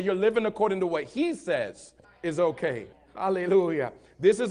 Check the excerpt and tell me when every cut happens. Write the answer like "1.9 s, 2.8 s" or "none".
2.0 s, 2.9 s

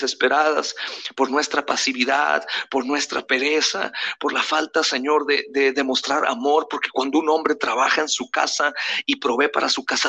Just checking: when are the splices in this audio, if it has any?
none

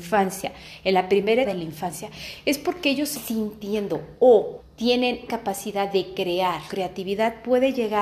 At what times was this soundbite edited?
1.4 s, 3.1 s, 4.6 s, 5.3 s, 6.7 s

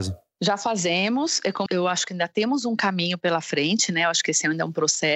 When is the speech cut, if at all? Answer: 1.7 s

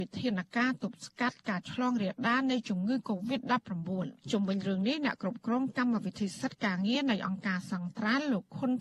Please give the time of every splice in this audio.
4.2 s

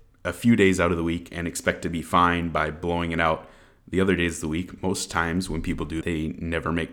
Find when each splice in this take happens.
6.0 s

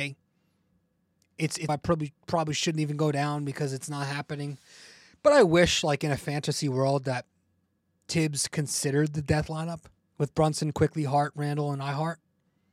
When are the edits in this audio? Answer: 1.7 s, 10.0 s

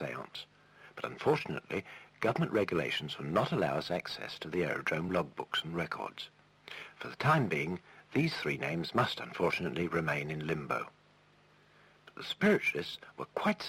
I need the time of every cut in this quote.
none

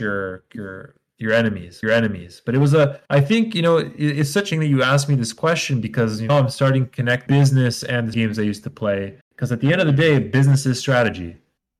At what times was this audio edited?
1.8 s, 3.1 s, 4.5 s, 6.3 s, 7.3 s, 8.1 s, 9.2 s

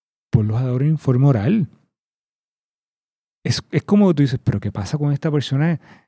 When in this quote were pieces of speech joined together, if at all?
none

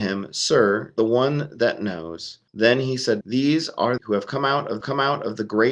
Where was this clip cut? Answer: 1.0 s, 2.5 s, 3.2 s, 4.0 s, 4.8 s

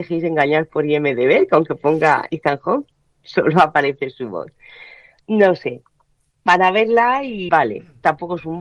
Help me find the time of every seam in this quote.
7.5 s

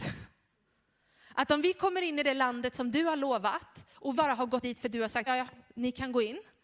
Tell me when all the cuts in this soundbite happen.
4.2 s, 4.6 s, 5.3 s

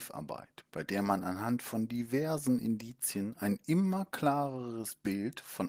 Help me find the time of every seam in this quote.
none

